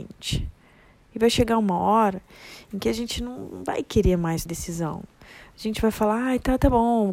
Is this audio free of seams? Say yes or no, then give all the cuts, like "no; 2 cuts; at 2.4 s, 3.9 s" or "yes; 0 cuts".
no; 1 cut; at 4.5 s